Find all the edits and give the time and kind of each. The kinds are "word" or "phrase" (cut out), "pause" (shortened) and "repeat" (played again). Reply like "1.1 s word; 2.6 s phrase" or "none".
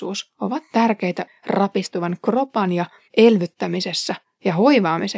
1.3 s word; 3.1 s word